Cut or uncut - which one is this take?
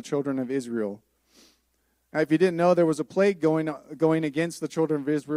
uncut